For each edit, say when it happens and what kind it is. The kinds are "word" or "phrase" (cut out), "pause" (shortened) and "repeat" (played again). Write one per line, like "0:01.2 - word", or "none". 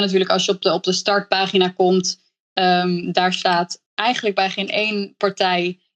0:03.9 - pause